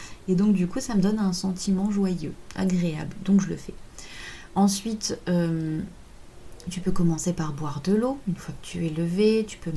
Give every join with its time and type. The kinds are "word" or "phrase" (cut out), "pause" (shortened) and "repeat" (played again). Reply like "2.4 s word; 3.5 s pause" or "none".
none